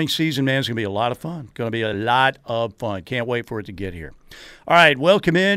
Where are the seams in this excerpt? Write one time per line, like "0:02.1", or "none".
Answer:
none